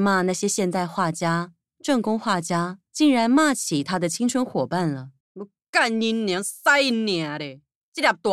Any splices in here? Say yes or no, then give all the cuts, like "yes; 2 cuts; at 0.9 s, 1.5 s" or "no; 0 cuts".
yes; 2 cuts; at 2.9 s, 5.2 s